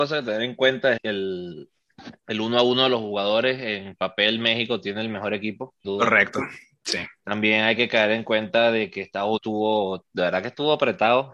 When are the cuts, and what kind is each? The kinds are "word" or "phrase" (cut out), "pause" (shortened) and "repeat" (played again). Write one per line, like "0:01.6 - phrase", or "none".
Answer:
0:01.0 - word
0:02.2 - pause
0:05.8 - word
0:09.4 - word